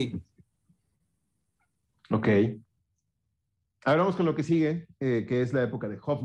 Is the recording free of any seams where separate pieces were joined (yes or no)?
yes